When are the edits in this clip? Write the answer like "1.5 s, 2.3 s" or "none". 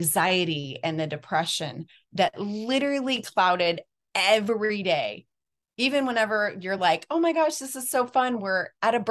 none